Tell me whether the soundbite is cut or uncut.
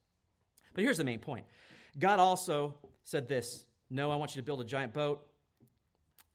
uncut